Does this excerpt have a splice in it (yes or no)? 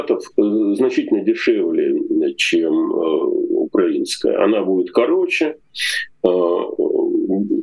no